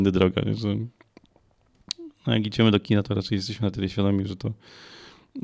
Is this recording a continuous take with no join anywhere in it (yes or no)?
yes